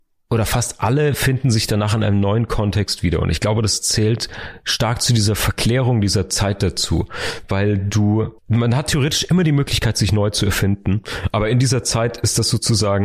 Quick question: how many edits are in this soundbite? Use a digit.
1